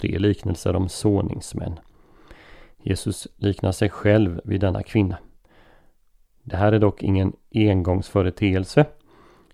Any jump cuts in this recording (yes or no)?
no